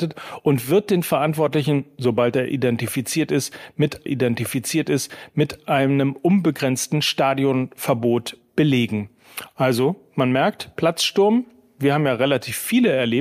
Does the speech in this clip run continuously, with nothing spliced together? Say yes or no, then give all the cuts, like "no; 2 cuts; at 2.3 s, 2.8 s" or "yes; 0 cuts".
no; 1 cut; at 4.1 s